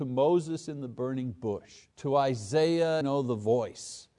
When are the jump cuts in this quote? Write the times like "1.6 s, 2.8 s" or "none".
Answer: 1.9 s, 3.0 s